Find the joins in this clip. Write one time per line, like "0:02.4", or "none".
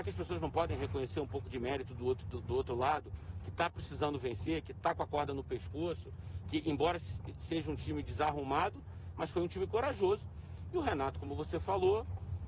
none